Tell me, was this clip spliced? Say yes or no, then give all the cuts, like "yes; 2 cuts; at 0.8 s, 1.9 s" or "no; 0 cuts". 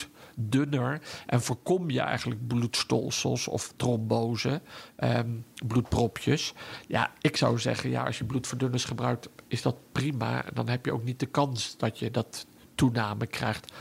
yes; 1 cut; at 7.2 s